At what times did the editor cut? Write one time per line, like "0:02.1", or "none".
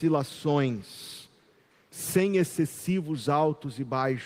none